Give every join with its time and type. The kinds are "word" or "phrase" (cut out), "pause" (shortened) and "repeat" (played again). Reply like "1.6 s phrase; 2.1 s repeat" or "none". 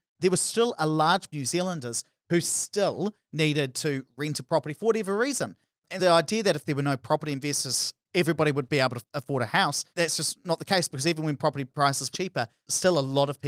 1.3 s phrase; 6.0 s word; 9.9 s pause; 12.1 s phrase